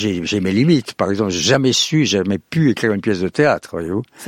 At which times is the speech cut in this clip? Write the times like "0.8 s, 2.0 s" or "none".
none